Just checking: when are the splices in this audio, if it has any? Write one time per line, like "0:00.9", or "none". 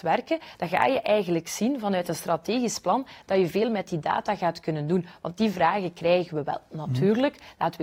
none